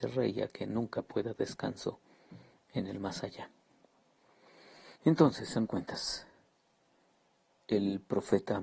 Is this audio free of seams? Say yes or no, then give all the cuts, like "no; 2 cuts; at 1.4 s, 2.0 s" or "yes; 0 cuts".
no; 3 cuts; at 1.4 s, 5.0 s, 5.7 s